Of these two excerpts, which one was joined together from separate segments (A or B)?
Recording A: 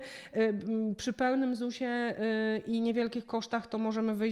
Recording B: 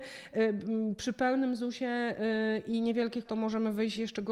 B